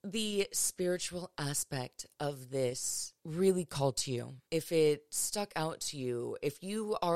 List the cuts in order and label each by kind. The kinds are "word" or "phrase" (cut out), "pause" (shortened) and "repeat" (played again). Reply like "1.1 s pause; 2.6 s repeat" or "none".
3.2 s pause; 4.5 s pause

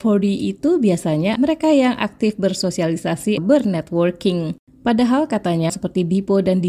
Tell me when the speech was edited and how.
1.4 s word; 3.4 s word; 5.7 s word

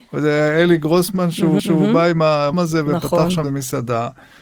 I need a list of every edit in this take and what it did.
1.6 s repeat; 2.5 s word; 3.4 s word

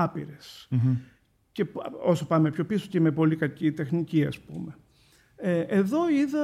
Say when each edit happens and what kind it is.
none

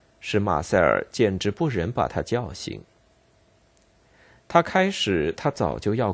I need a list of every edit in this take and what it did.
none

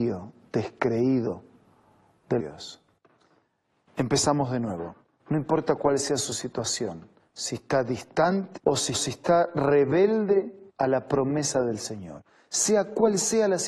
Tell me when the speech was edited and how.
2.4 s phrase; 5.1 s pause; 7.2 s pause; 8.6 s phrase; 8.9 s repeat; 10.7 s pause

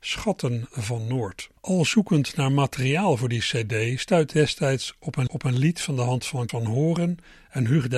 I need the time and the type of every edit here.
1.6 s pause; 4.3 s word; 5.3 s repeat; 6.5 s word

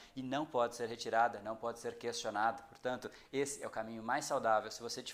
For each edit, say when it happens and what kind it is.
none

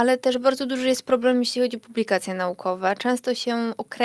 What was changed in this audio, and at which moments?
none

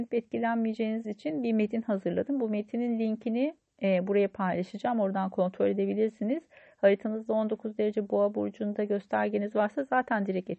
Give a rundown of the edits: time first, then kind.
1.0 s word

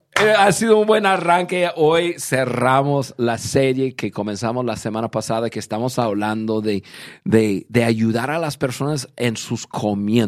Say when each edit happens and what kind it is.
none

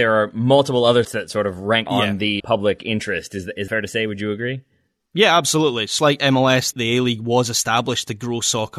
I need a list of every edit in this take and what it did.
1.0 s word; 1.9 s word; 2.4 s word; 3.7 s word; 6.0 s word; 6.7 s word

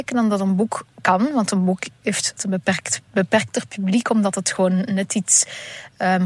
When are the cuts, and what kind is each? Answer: 2.4 s word; 3.1 s pause

